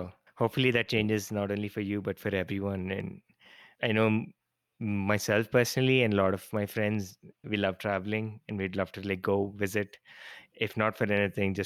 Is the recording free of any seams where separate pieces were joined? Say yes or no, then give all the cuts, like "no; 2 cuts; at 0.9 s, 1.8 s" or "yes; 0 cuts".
yes; 0 cuts